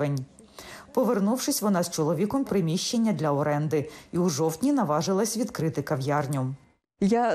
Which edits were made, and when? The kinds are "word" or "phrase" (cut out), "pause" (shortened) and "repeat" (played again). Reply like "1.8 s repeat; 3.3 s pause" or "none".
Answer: 2.4 s word